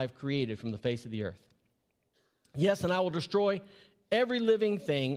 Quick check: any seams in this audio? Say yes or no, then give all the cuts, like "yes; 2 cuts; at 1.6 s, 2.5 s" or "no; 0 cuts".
no; 0 cuts